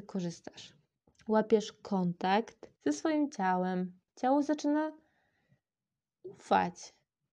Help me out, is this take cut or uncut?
cut